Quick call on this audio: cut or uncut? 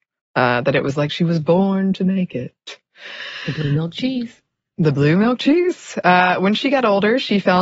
uncut